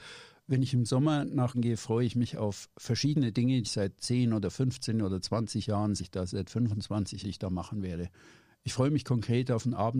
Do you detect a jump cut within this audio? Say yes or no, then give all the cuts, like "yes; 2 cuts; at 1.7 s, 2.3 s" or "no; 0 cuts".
yes; 5 cuts; at 1.5 s, 3.6 s, 6.0 s, 6.3 s, 7.2 s